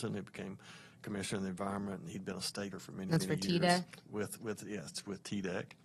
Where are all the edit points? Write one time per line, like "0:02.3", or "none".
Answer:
0:02.7